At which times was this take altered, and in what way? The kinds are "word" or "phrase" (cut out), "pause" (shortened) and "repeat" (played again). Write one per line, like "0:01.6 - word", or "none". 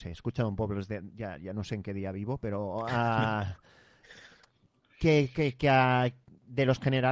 none